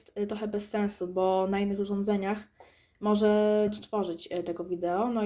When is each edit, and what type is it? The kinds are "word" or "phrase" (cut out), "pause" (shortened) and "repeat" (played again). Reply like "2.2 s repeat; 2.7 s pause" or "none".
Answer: 3.7 s word